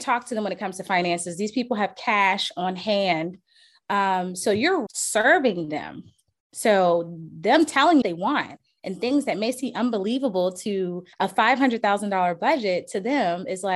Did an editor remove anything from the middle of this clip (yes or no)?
yes